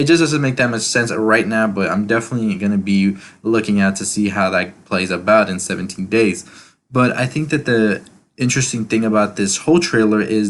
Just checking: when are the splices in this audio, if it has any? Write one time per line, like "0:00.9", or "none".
none